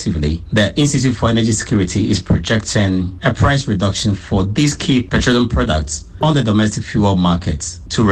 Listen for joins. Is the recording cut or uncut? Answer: uncut